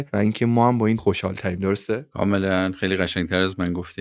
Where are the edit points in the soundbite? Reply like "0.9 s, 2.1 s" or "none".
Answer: 1.0 s